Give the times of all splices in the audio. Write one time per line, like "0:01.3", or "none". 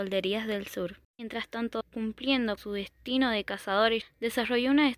0:01.8
0:02.6
0:04.0